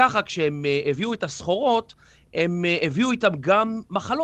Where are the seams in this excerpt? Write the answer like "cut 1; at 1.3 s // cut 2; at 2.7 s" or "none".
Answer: none